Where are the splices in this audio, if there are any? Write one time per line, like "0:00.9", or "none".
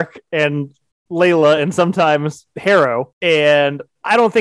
none